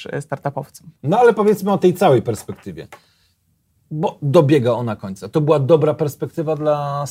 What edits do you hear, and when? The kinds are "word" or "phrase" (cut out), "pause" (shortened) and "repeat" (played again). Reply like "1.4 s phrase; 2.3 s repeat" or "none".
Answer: none